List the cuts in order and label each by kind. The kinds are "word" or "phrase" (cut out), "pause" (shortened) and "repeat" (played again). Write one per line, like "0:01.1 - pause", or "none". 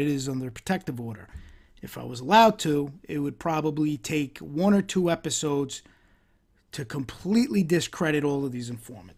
none